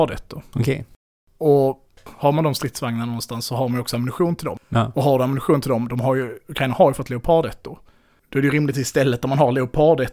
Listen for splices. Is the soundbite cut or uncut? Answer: uncut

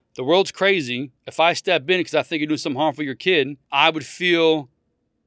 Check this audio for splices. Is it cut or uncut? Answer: cut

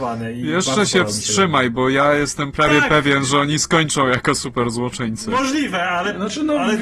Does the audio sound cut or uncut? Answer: uncut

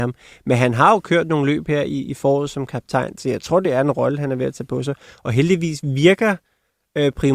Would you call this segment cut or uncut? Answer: uncut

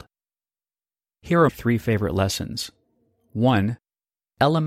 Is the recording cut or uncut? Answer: cut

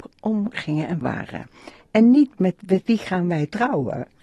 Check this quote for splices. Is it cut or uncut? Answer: cut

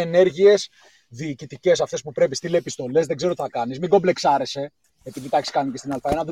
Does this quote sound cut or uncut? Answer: uncut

